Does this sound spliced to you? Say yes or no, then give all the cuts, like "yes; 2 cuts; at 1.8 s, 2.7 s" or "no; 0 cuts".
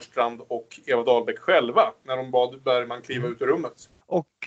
no; 0 cuts